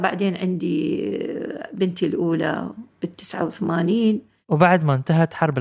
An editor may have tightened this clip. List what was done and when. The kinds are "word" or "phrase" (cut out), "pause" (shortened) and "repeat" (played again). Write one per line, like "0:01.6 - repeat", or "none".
none